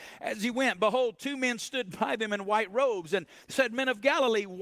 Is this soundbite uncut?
no; 1 cut; at 3.4 s

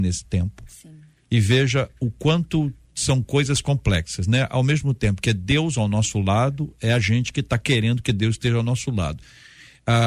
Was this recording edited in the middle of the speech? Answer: no; 0 cuts

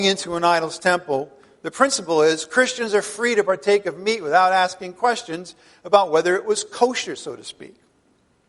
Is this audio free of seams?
yes; 0 cuts

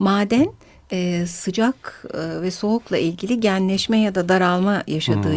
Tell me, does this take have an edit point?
no; 0 cuts

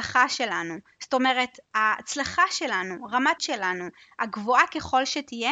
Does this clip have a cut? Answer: yes; 2 cuts; at 1.6 s, 3.4 s

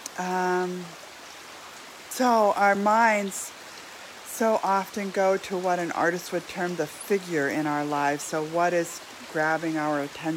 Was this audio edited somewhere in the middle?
no; 0 cuts

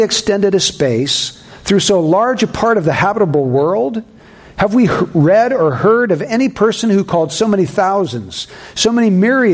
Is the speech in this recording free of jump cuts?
yes; 0 cuts

